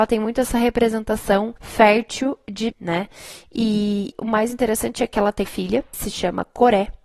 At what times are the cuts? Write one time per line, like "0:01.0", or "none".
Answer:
0:01.6
0:02.7
0:04.1
0:05.4
0:05.9